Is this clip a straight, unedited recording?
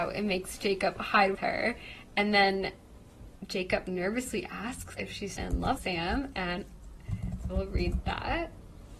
no; 5 cuts; at 1.3 s, 5.0 s, 5.4 s, 5.8 s, 7.5 s

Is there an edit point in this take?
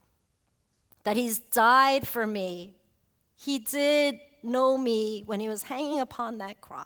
no; 0 cuts

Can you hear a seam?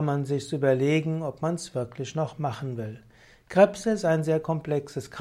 no; 0 cuts

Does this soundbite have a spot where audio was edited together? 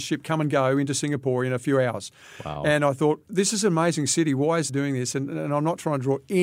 yes; 1 cut; at 4.7 s

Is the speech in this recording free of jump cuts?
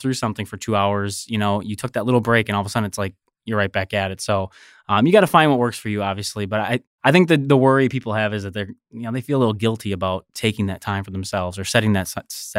yes; 0 cuts

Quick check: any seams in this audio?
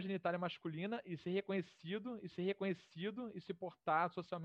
yes; 1 cut; at 2.3 s

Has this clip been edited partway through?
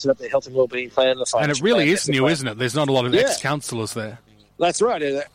no; 0 cuts

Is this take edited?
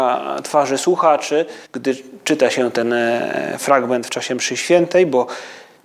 yes; 1 cut; at 1.6 s

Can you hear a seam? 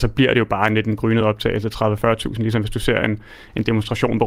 no; 0 cuts

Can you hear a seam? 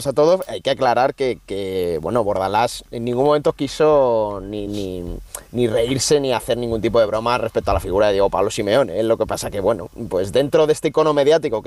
no; 0 cuts

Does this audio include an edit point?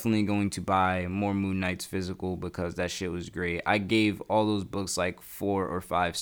no; 0 cuts

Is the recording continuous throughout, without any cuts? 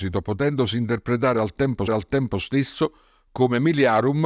no; 1 cut; at 1.9 s

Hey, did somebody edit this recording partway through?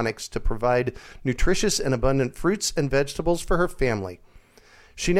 no; 0 cuts

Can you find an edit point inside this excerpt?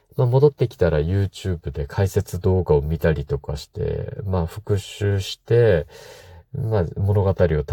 no; 0 cuts

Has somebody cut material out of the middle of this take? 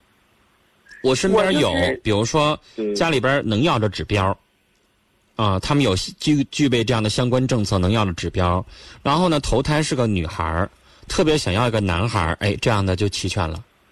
no; 0 cuts

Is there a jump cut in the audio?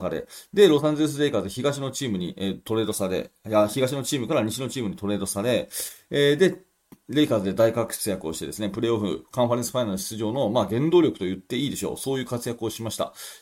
no; 0 cuts

